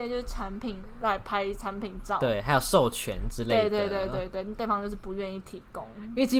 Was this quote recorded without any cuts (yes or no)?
yes